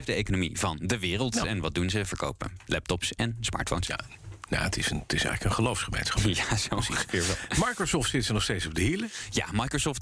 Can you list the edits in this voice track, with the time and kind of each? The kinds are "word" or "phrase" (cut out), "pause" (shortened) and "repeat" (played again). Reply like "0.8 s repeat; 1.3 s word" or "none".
none